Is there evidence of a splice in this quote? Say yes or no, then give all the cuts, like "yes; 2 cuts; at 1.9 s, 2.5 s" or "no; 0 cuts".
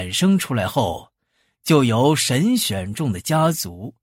no; 0 cuts